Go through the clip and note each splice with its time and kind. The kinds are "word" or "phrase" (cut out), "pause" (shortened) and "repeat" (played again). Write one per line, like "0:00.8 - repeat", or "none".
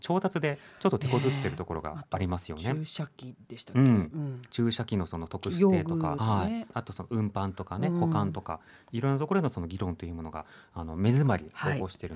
0:06.2 - word